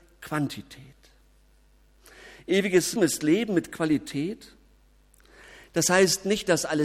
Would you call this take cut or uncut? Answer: cut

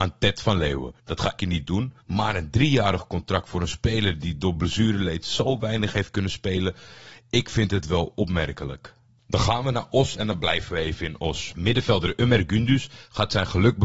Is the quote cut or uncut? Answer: cut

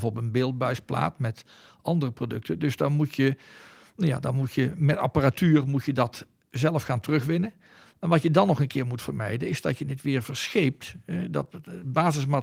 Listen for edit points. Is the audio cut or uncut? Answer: uncut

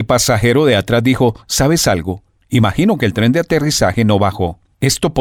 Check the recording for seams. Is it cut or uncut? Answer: uncut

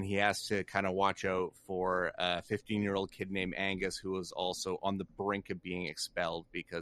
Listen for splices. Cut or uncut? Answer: uncut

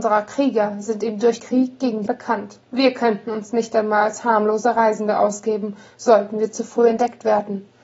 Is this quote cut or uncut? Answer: cut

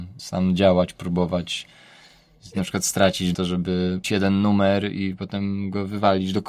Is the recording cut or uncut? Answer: cut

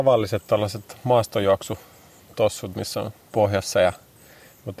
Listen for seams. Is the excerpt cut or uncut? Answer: cut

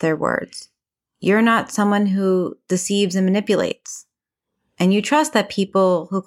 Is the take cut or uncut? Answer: uncut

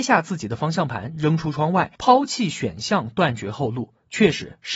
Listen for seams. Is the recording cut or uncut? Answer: cut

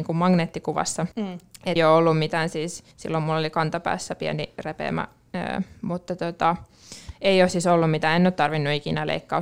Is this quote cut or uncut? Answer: cut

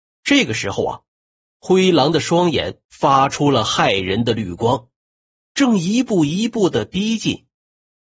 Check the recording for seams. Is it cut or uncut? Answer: cut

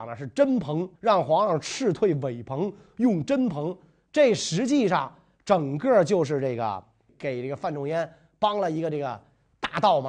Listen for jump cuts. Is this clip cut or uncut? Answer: cut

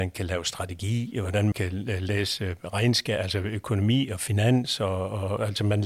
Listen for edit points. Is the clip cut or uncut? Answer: cut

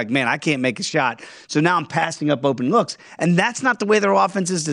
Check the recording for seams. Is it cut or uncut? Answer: uncut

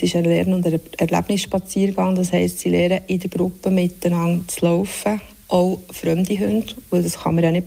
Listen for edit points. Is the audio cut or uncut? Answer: uncut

